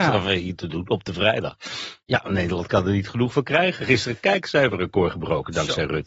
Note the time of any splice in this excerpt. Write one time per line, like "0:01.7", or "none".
none